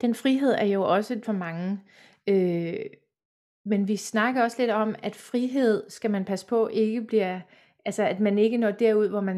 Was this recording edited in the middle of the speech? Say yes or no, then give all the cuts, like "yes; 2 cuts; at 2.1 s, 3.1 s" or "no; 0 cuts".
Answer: yes; 1 cut; at 1.2 s